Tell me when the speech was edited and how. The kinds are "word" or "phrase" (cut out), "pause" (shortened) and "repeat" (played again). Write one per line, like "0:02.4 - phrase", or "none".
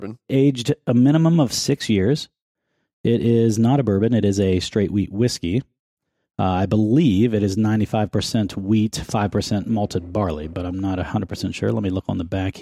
none